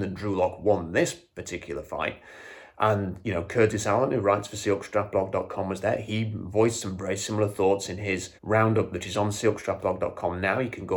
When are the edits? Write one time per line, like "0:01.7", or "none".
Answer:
0:08.4